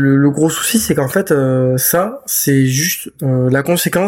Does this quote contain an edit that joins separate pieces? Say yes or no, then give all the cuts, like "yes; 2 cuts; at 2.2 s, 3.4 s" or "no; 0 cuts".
no; 0 cuts